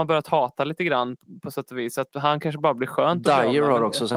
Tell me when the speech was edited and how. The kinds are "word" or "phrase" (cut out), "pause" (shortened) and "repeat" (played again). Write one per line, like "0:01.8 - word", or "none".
none